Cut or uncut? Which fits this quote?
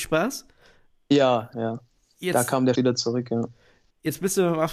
cut